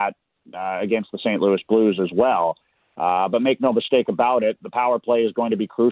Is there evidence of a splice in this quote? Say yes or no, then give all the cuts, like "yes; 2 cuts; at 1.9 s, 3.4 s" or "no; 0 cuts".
no; 0 cuts